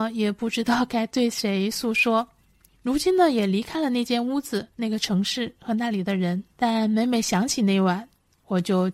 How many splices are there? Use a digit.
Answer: 2